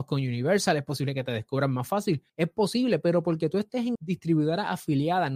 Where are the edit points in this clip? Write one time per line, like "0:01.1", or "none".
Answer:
0:02.3
0:04.0